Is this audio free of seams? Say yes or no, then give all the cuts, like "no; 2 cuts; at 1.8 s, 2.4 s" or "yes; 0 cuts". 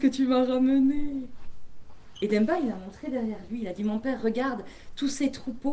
yes; 0 cuts